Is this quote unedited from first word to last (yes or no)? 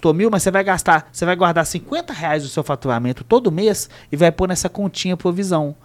yes